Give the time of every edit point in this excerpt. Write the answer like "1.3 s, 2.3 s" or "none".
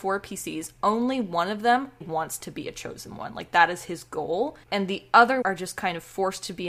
2.0 s, 4.6 s, 5.4 s